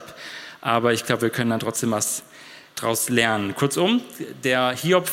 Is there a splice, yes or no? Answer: yes